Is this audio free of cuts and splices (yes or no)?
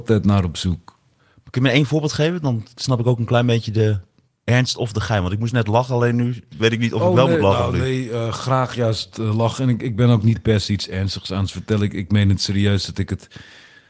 no